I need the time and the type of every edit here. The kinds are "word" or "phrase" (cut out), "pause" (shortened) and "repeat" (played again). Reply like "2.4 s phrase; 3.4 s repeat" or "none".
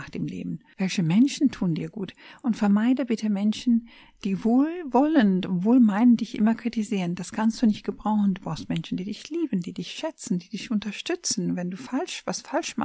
none